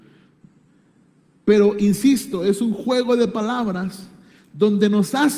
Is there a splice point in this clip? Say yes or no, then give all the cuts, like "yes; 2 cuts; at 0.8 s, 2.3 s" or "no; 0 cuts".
no; 0 cuts